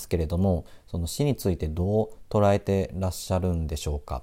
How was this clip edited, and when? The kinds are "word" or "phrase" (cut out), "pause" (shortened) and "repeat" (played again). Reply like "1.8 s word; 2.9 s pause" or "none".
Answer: none